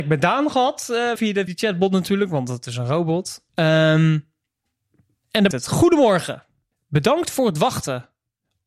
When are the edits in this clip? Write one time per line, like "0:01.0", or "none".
0:01.2
0:01.5
0:03.5
0:05.5
0:06.7